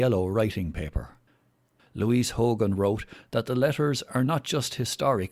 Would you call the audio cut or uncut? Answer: uncut